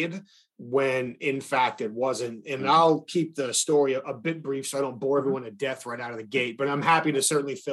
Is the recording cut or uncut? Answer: uncut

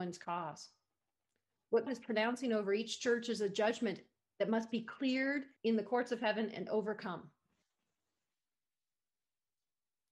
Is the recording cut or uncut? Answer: cut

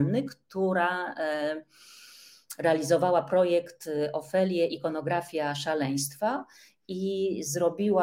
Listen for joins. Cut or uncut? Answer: uncut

